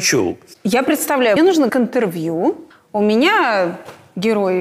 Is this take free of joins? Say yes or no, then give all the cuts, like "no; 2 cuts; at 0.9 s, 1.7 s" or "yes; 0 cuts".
no; 3 cuts; at 1.4 s, 1.7 s, 2.7 s